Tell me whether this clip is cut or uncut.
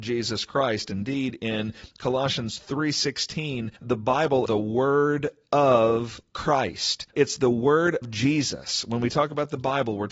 cut